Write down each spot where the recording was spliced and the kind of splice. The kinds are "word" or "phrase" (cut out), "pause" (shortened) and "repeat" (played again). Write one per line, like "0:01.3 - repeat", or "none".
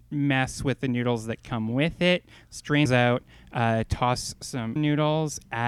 0:02.9 - word
0:04.8 - word